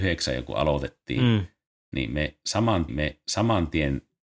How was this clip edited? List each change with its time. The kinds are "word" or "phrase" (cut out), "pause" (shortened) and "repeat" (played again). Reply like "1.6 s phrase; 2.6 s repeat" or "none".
2.9 s repeat